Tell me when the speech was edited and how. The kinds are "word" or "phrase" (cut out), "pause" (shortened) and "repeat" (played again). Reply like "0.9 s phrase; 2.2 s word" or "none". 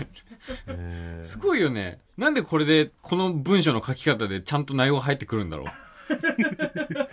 2.1 s pause; 3.0 s pause